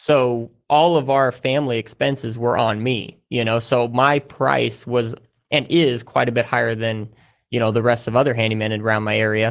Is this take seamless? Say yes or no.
yes